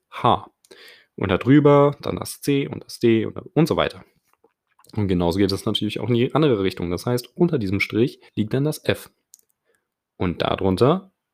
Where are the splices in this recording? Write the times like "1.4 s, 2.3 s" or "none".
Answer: 8.3 s

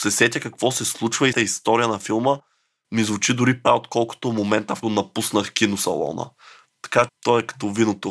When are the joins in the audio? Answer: 1.3 s, 3.6 s, 4.8 s, 7.1 s

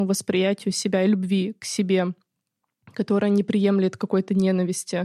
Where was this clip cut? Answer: none

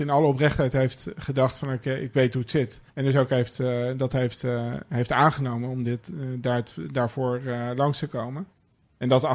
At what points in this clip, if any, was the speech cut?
2.9 s

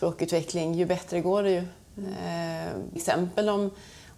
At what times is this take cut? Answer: 3.0 s

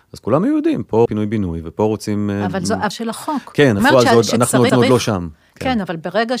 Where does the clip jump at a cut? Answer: 1.1 s, 2.9 s, 3.8 s, 4.7 s

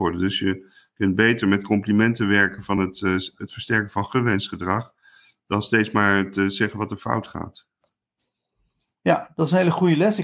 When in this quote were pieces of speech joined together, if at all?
none

